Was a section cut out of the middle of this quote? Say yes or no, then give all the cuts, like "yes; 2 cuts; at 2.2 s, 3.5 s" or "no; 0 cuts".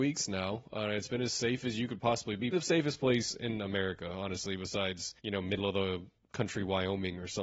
yes; 2 cuts; at 2.5 s, 5.2 s